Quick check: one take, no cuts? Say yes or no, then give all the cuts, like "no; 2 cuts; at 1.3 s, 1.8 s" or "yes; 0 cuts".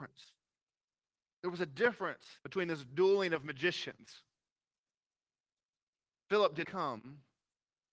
no; 2 cuts; at 2.4 s, 6.6 s